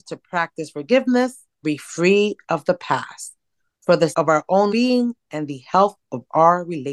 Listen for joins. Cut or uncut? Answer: cut